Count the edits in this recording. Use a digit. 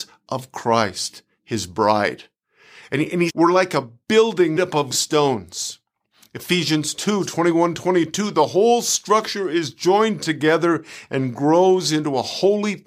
3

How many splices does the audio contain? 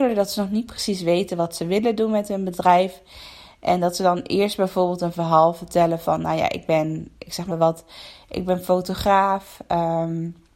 1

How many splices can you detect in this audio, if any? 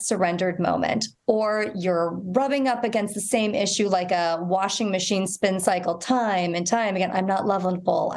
0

